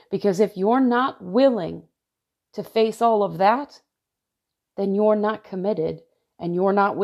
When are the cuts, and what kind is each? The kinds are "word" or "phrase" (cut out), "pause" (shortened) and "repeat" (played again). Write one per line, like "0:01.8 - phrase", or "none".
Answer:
none